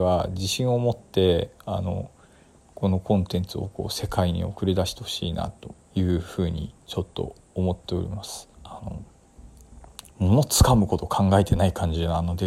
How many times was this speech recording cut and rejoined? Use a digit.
4